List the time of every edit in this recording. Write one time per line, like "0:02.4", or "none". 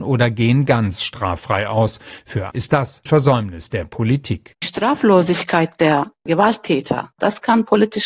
0:02.5
0:03.1